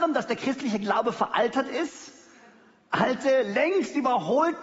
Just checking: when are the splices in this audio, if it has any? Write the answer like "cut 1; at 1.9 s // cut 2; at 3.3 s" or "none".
none